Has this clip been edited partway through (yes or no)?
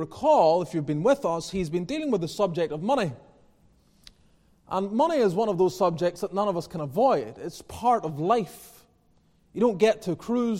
no